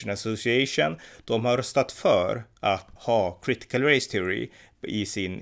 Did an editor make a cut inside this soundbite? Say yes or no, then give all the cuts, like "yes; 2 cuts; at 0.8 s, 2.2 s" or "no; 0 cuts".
yes; 1 cut; at 3.0 s